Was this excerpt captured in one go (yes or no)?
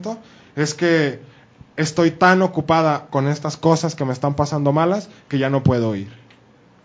yes